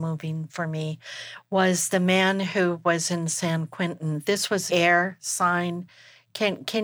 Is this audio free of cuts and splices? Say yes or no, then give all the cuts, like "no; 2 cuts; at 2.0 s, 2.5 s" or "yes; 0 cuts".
no; 1 cut; at 4.7 s